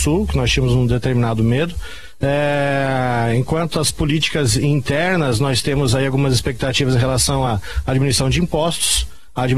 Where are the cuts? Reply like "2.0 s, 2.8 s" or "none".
none